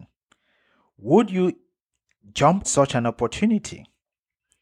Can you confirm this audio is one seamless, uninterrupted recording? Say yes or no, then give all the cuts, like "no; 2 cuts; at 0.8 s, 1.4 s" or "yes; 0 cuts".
no; 1 cut; at 2.6 s